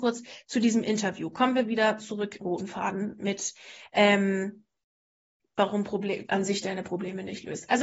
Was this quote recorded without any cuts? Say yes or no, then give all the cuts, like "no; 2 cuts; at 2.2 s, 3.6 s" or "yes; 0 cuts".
no; 2 cuts; at 2.4 s, 6.3 s